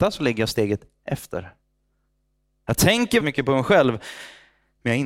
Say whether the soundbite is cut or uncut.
cut